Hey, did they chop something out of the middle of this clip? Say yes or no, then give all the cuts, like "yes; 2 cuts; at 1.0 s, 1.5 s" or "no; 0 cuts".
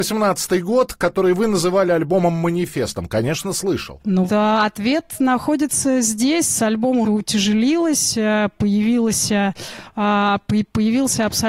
yes; 2 cuts; at 4.3 s, 7.0 s